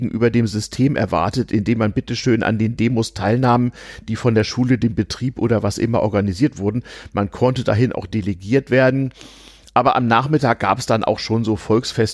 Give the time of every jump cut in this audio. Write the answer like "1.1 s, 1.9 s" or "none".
none

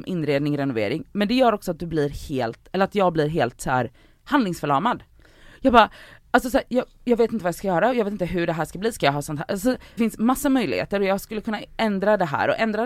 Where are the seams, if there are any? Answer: 10.0 s

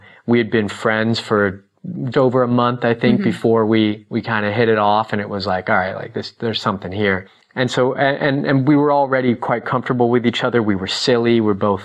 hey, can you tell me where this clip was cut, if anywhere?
2.1 s

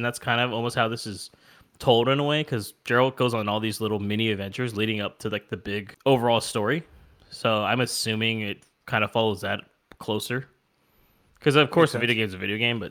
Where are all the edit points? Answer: none

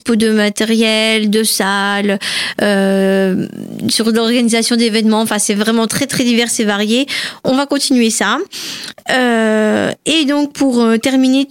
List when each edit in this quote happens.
none

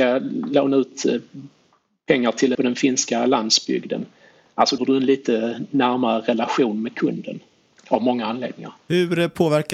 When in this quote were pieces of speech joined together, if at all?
2.5 s, 4.8 s

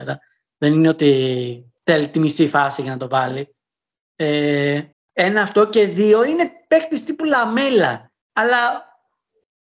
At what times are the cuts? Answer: 1.8 s, 4.9 s, 8.2 s

